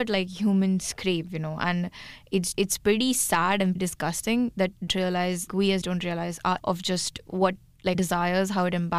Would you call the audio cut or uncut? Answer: cut